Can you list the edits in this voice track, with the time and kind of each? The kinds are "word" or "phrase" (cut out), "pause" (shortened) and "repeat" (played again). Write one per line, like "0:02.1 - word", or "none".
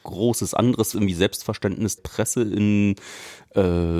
0:00.9 - word
0:02.0 - word